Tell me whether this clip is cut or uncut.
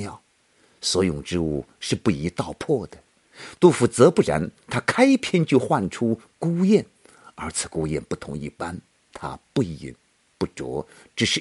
uncut